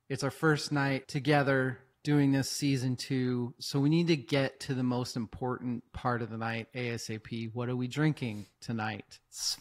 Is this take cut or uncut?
uncut